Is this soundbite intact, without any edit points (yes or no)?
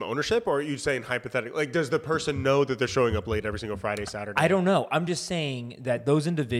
yes